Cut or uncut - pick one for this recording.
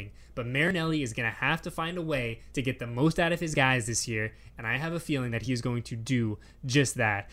uncut